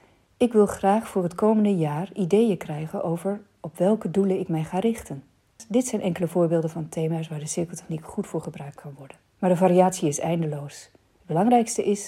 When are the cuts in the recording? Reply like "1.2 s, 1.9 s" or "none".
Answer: 9.3 s